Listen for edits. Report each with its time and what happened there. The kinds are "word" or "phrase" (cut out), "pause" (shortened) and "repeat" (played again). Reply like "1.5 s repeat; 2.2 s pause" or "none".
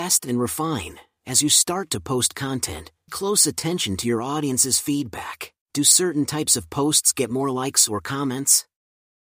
3.1 s word; 5.6 s pause